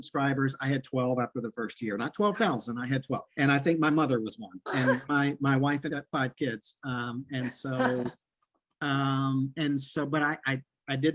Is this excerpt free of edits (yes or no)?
no